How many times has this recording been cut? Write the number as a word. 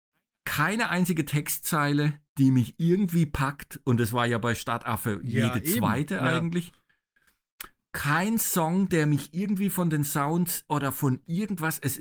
one